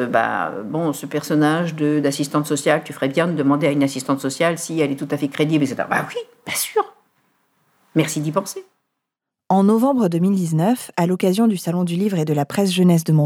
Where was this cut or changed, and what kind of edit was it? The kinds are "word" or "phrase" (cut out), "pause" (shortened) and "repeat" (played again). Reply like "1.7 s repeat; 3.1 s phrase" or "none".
none